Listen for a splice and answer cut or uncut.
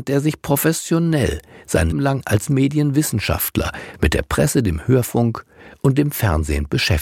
cut